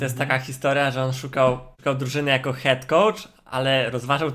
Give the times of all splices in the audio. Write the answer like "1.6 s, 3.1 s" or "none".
1.7 s